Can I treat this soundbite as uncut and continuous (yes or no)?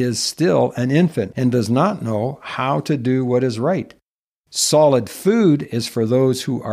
yes